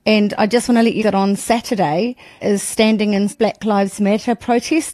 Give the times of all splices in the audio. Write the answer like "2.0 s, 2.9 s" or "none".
1.0 s, 2.4 s, 3.3 s